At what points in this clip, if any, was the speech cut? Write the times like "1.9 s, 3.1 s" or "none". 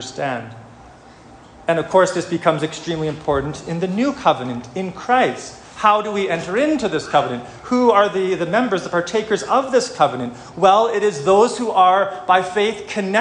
none